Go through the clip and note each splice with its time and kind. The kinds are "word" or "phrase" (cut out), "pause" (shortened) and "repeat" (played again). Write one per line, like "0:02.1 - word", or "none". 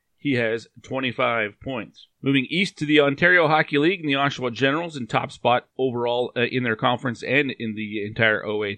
0:02.1 - pause
0:05.7 - pause